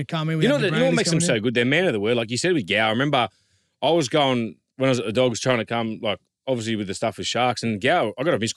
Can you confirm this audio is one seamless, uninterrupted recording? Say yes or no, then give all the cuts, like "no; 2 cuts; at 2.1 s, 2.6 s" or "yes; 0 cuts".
yes; 0 cuts